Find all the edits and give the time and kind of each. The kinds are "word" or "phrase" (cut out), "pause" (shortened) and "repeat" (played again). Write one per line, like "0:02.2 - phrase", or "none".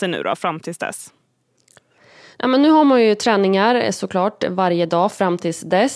none